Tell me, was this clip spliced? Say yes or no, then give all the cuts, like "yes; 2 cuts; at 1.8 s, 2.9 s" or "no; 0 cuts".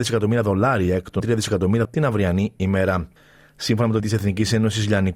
yes; 3 cuts; at 1.2 s, 1.8 s, 4.0 s